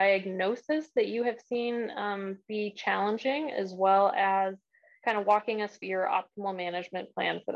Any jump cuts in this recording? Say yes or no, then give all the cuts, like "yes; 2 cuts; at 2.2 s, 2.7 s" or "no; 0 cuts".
yes; 1 cut; at 5.8 s